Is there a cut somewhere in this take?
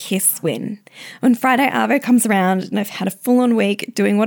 no; 0 cuts

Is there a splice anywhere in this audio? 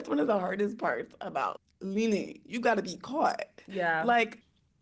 no; 0 cuts

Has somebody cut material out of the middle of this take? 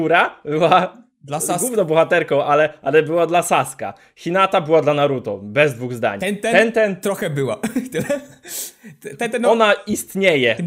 no; 0 cuts

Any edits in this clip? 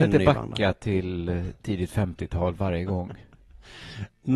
no; 0 cuts

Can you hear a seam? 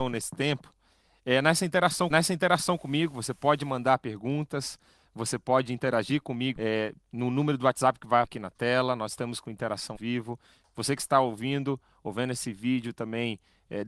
yes; 4 cuts; at 2.1 s, 6.6 s, 8.2 s, 9.9 s

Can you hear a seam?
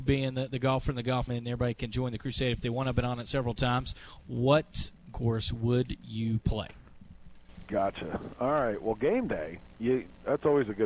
yes; 2 cuts; at 1.3 s, 5.1 s

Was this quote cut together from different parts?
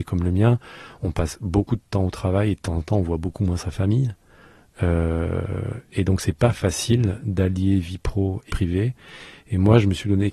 yes; 1 cut; at 8.5 s

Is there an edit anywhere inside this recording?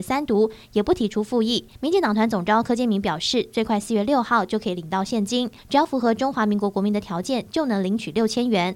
yes; 2 cuts; at 1.7 s, 5.6 s

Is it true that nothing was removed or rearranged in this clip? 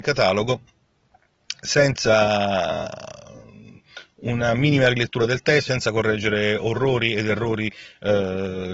no; 1 cut; at 5.7 s

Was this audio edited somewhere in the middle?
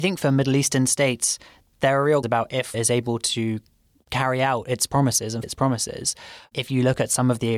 yes; 3 cuts; at 2.2 s, 2.7 s, 5.4 s

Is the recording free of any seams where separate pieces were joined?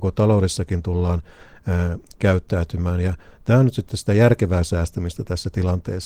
yes; 0 cuts

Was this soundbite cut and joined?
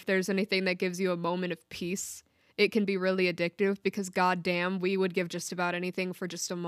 no; 0 cuts

